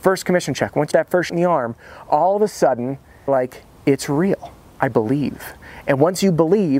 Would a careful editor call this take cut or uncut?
cut